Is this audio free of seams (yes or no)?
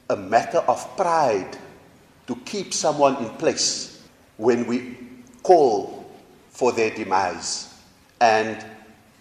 yes